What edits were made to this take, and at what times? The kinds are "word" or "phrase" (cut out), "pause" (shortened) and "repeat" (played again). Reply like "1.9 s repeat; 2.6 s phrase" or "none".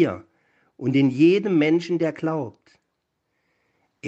none